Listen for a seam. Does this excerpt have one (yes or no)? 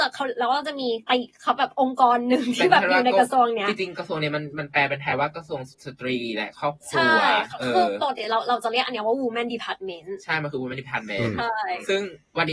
yes